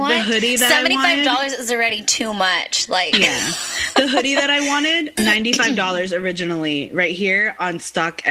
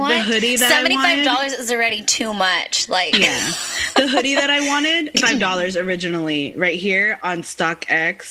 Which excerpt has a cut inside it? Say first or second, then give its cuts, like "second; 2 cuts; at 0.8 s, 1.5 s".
second; 1 cut; at 5.1 s